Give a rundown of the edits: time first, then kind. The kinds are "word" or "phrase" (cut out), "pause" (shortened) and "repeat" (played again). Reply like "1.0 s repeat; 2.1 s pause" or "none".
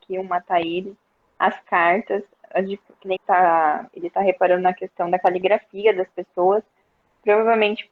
3.2 s word